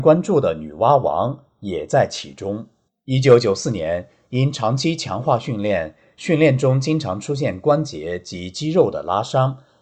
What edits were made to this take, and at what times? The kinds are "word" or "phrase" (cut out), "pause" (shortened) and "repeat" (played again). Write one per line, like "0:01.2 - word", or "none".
0:02.9 - pause